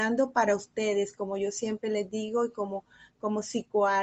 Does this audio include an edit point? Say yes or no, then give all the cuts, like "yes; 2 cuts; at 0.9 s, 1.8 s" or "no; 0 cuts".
no; 0 cuts